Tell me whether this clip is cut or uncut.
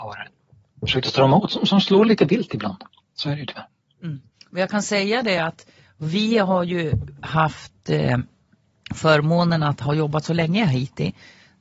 uncut